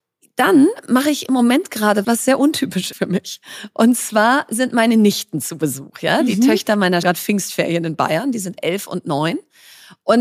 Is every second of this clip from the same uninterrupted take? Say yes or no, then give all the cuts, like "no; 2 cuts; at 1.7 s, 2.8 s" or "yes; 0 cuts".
no; 3 cuts; at 2.0 s, 2.9 s, 7.0 s